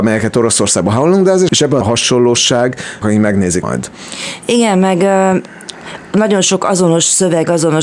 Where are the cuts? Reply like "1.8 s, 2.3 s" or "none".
1.5 s, 1.8 s, 3.0 s, 3.6 s